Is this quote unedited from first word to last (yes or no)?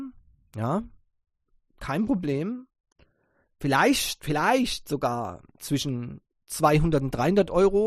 yes